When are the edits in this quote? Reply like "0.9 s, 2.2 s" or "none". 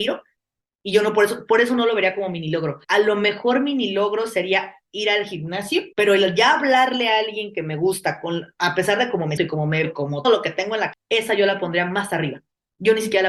2.8 s, 5.9 s, 9.4 s, 9.8 s, 10.2 s, 10.9 s